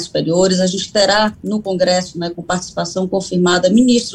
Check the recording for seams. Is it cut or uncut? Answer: cut